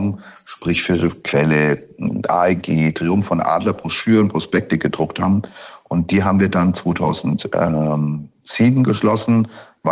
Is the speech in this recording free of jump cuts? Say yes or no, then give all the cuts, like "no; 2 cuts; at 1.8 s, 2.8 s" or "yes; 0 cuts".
yes; 0 cuts